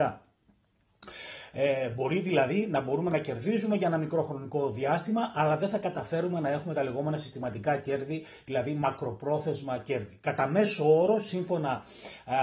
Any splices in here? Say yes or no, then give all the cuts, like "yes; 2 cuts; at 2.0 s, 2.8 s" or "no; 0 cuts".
no; 0 cuts